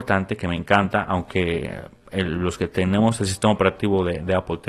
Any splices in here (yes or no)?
no